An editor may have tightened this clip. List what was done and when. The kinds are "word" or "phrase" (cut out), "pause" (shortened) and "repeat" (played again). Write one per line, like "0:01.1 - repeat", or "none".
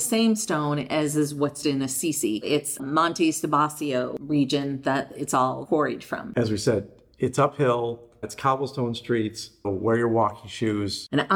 0:01.6 - word
0:02.8 - word
0:08.2 - word
0:09.6 - word